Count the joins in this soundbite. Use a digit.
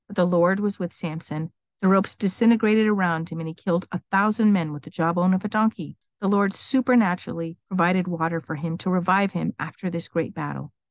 0